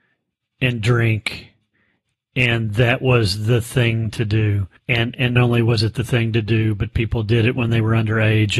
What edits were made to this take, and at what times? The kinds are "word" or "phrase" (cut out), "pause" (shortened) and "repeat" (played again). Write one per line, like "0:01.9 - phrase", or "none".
0:04.8 - pause
0:05.4 - word